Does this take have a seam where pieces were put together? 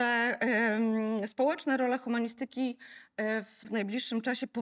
yes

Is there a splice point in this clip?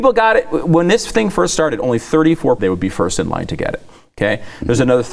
yes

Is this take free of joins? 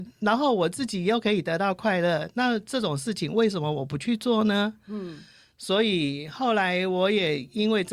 yes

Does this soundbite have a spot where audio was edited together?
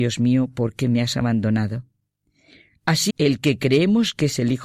yes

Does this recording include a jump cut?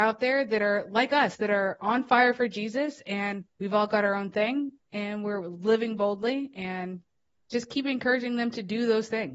yes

